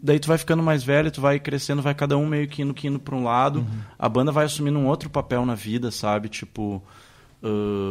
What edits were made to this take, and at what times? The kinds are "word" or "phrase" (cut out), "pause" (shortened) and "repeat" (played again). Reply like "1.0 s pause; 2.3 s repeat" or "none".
2.8 s repeat